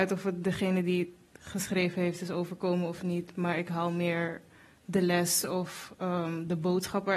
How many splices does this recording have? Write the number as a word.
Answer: zero